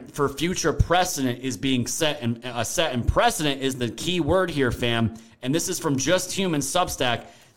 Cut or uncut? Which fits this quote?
uncut